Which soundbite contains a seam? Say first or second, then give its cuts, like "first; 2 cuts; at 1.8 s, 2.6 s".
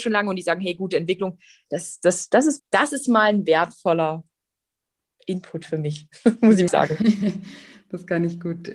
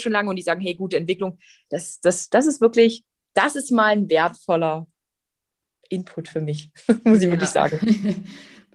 first; 2 cuts; at 2.6 s, 6.7 s